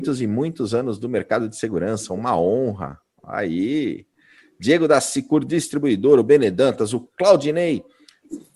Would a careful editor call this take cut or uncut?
uncut